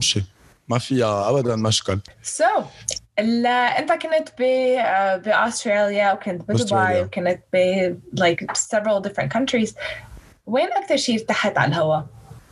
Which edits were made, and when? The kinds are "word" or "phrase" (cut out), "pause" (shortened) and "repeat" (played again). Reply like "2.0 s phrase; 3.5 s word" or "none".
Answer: none